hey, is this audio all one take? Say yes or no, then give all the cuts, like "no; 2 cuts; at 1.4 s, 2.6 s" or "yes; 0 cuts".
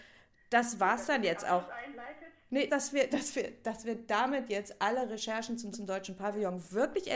no; 3 cuts; at 2.7 s, 3.1 s, 5.7 s